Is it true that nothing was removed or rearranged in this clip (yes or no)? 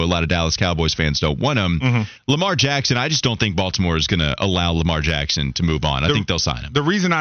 yes